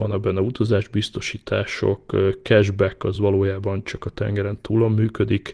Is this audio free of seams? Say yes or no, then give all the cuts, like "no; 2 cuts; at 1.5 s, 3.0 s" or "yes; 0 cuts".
yes; 0 cuts